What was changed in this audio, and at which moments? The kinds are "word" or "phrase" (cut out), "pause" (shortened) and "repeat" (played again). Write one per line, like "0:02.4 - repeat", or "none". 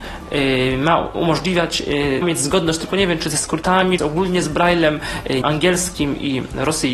0:02.2 - word
0:04.0 - word
0:05.4 - word